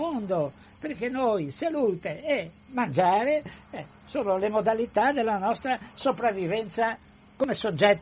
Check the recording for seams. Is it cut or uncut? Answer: uncut